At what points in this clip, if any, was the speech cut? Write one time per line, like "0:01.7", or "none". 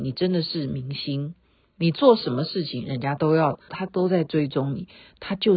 0:03.7

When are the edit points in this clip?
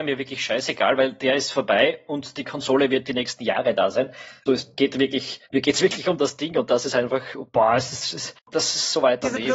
0:04.5
0:05.4

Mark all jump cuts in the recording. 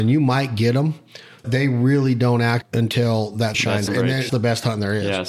0:01.4
0:02.6
0:03.5
0:03.9
0:04.3

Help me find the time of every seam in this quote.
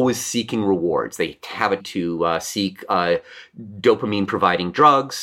0:01.8

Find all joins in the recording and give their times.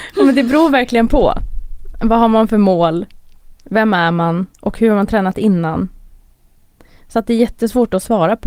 0:03.6
0:04.5

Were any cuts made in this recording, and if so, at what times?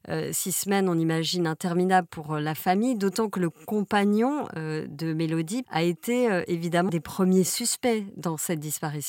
0:02.1
0:05.6
0:06.9

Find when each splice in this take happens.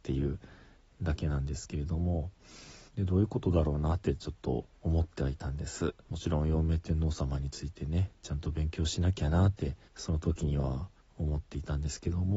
0:02.9
0:04.8
0:06.0
0:09.9
0:11.0

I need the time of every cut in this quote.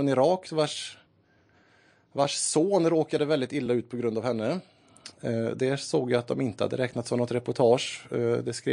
none

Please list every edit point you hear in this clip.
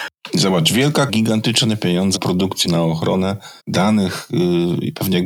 0:01.1
0:02.2
0:02.6
0:03.6

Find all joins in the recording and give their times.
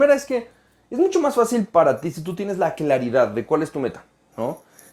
none

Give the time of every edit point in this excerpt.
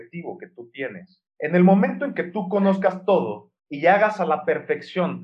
0:01.3
0:03.6

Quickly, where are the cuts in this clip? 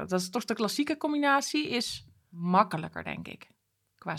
none

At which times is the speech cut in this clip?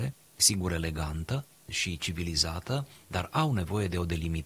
none

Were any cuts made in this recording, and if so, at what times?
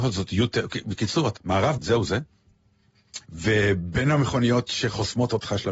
0:01.4
0:01.8
0:03.2

